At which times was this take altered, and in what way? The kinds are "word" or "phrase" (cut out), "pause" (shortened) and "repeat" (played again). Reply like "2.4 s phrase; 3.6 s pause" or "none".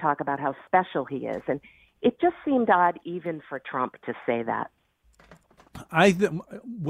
none